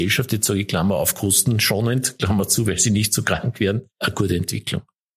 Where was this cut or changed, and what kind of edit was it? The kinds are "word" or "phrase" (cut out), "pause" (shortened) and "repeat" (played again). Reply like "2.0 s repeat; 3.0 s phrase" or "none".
3.9 s pause